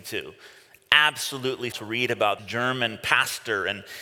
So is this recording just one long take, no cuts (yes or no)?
no